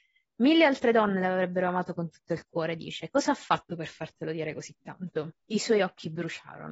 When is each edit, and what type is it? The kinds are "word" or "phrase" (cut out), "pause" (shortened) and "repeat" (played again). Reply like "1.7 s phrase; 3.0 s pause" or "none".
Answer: 5.4 s pause